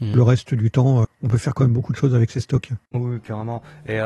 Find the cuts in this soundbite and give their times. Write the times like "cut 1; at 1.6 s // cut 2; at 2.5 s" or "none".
cut 1; at 1.0 s // cut 2; at 2.9 s